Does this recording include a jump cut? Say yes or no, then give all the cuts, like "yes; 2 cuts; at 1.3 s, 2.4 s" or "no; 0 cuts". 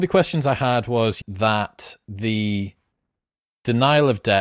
yes; 1 cut; at 1.2 s